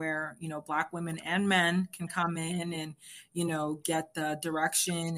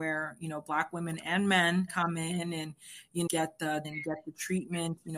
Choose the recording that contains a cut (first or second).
second